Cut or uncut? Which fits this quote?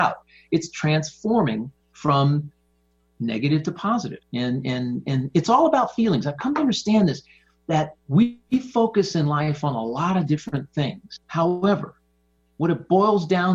cut